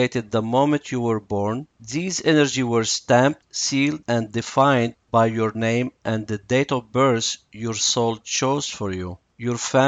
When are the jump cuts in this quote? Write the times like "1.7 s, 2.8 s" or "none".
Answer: 1.7 s